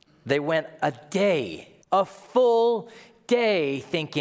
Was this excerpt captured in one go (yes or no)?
no